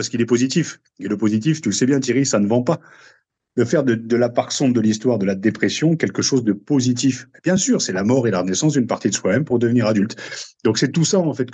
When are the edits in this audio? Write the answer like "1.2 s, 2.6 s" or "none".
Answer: none